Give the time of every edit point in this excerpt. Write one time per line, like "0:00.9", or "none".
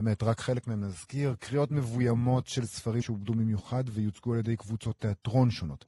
0:03.0